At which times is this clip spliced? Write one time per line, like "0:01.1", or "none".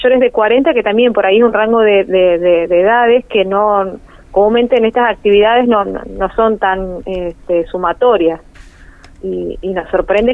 none